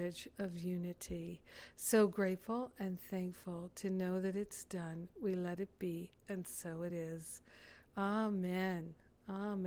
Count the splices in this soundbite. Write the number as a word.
zero